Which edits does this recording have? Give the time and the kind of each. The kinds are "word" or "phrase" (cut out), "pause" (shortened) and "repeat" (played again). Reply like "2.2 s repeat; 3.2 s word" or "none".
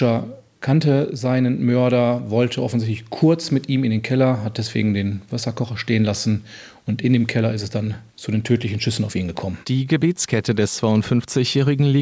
8.1 s pause; 9.6 s pause